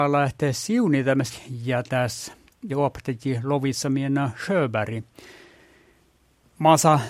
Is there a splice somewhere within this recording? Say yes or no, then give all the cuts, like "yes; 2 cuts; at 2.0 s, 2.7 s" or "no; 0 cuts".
yes; 2 cuts; at 1.3 s, 2.7 s